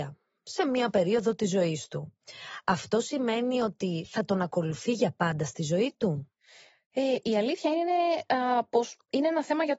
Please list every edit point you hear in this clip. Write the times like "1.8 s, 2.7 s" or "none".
none